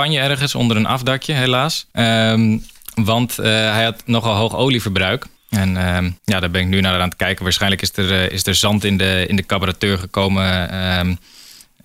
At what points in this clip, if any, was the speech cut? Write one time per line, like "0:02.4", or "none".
0:01.9
0:05.4
0:06.2